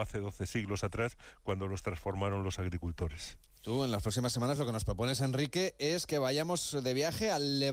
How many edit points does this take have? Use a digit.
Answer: 0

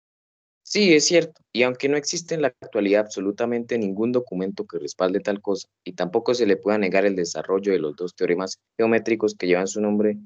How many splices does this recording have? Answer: 2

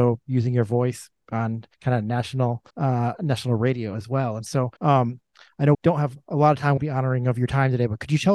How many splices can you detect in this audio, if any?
5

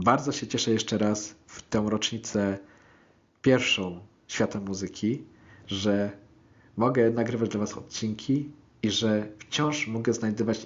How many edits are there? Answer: 0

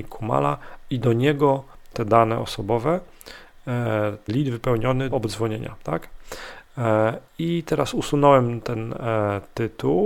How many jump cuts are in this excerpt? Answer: 4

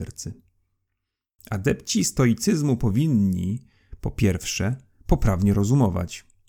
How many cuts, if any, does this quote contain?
0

